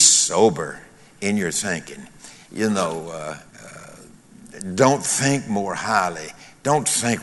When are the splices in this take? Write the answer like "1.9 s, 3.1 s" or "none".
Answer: 3.5 s